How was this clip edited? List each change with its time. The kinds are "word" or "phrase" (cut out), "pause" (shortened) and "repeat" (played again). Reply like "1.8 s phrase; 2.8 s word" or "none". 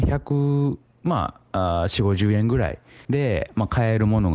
3.0 s pause